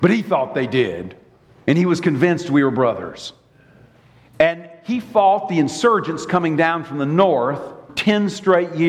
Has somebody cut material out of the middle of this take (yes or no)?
yes